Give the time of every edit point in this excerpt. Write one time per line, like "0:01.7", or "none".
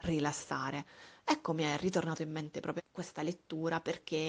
0:02.8